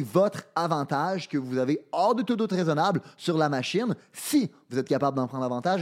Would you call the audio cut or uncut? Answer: uncut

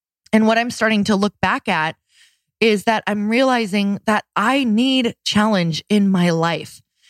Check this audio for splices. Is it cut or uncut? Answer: uncut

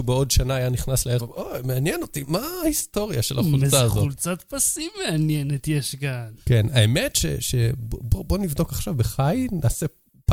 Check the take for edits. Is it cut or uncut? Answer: cut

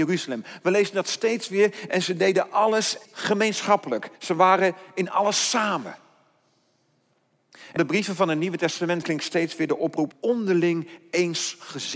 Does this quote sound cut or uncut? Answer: cut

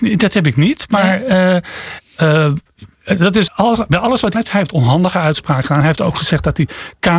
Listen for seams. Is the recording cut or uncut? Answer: cut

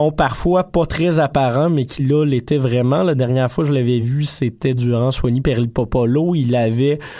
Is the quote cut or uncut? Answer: uncut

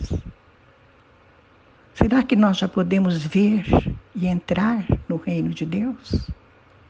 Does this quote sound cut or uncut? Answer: uncut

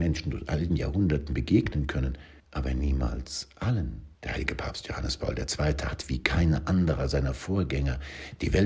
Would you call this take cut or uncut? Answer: cut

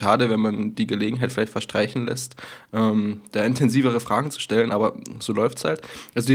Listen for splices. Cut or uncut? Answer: uncut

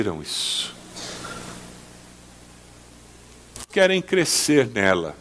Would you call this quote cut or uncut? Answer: cut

